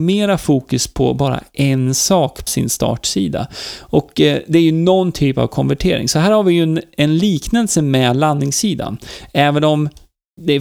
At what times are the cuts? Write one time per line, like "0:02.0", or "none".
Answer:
0:02.5